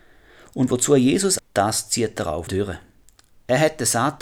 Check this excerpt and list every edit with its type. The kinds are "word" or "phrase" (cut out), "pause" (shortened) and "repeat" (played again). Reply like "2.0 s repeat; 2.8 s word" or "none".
1.4 s word; 2.5 s word